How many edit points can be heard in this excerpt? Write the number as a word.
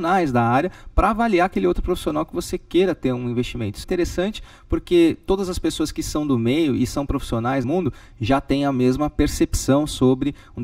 two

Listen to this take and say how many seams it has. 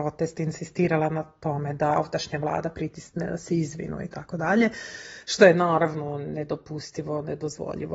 one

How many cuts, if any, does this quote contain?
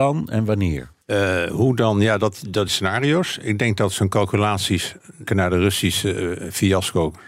three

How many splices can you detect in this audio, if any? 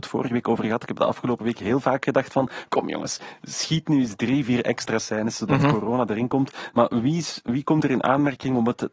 zero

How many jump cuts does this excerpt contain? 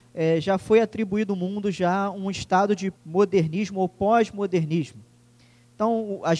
one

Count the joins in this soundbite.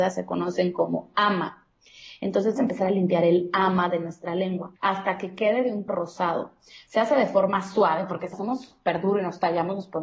four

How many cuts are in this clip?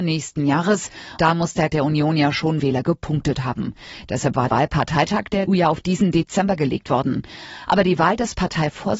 five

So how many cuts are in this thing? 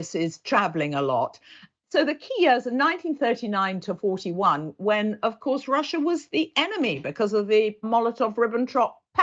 zero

